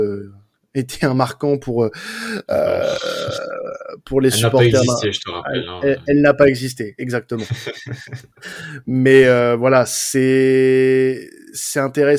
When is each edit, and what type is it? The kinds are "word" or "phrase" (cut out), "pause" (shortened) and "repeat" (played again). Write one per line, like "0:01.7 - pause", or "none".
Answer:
none

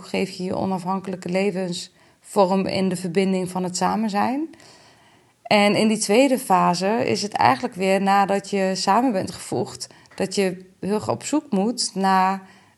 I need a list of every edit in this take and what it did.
none

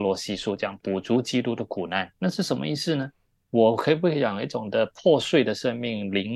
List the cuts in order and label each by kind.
0:03.4 - pause

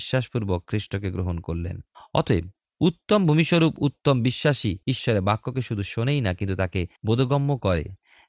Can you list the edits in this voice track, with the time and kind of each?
0:01.9 - pause
0:04.8 - pause
0:07.0 - pause

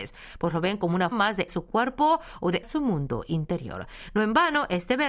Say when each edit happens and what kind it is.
0:01.1 - word
0:01.5 - word
0:02.6 - word

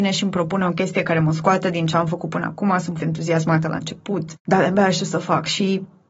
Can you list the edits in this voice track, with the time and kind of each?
0:03.0 - word
0:04.4 - pause

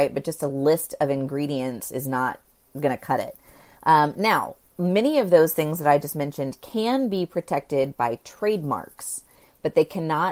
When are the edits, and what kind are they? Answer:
none

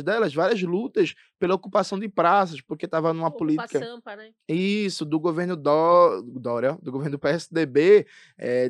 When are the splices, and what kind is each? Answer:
none

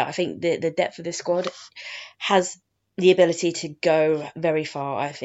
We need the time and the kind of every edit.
none

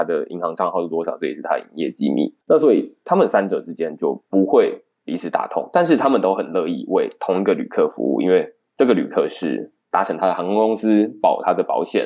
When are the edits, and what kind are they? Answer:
0:02.4 - pause

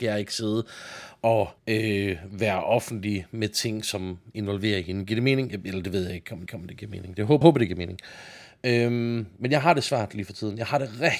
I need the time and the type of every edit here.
0:01.6 - pause
0:06.5 - repeat
0:07.4 - word

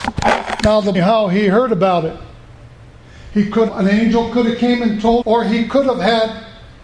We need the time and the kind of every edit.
0:00.9 - phrase
0:03.7 - word
0:05.2 - word

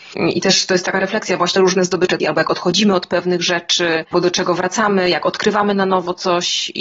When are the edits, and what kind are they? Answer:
0:01.6 - phrase
0:02.2 - word
0:04.1 - word

